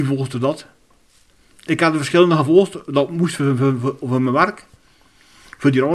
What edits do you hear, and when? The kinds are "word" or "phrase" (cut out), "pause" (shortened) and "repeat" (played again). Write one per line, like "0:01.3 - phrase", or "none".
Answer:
none